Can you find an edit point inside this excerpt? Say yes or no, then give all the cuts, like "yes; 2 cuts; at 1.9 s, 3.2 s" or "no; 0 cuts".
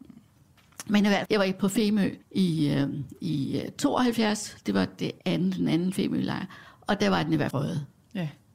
yes; 4 cuts; at 1.3 s, 2.2 s, 5.2 s, 7.5 s